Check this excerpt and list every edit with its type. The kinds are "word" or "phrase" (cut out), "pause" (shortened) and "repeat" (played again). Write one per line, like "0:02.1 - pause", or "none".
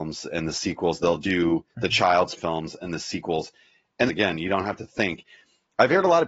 0:01.2 - word
0:01.7 - pause
0:02.4 - word
0:04.1 - phrase